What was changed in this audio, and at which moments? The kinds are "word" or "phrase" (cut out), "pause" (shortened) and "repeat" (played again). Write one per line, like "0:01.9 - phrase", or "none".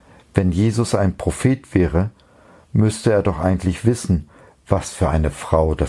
none